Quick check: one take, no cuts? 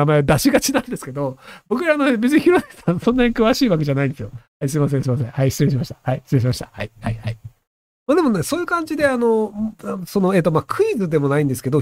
yes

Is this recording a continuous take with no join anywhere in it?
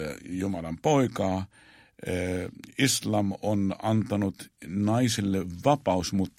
yes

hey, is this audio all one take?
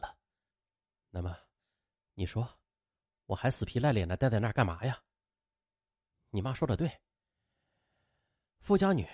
yes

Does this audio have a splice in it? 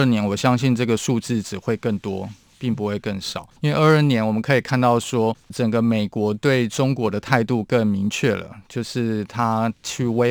yes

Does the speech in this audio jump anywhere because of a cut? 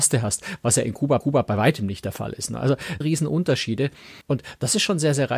yes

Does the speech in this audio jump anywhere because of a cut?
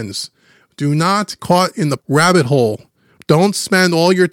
yes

